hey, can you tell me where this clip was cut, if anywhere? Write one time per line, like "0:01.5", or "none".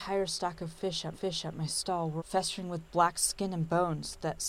0:01.1
0:02.2